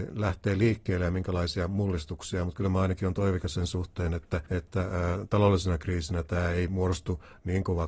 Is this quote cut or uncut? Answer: cut